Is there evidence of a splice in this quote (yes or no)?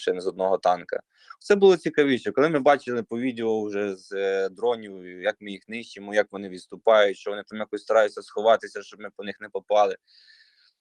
no